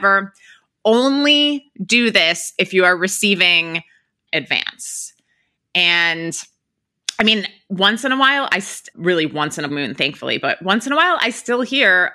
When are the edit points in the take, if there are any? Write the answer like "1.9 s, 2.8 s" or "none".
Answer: 4.3 s, 8.9 s, 9.7 s